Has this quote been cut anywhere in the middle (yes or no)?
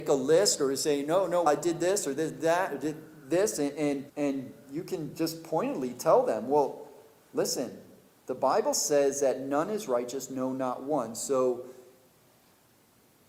yes